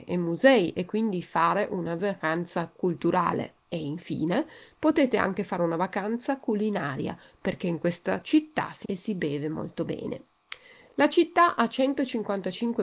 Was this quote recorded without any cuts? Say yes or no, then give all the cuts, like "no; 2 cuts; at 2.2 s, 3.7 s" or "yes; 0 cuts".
no; 2 cuts; at 3.6 s, 8.8 s